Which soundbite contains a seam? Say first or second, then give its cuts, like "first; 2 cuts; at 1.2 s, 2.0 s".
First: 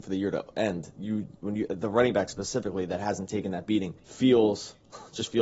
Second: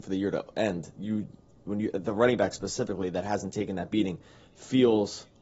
first; 2 cuts; at 1.4 s, 4.0 s